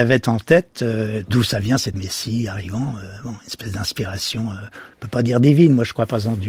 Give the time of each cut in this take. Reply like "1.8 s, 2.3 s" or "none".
1.9 s